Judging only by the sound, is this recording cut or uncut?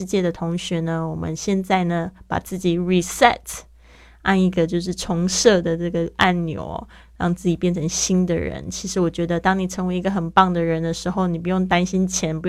uncut